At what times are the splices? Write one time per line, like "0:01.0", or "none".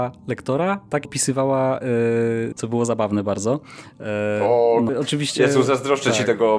0:01.0
0:02.5
0:04.9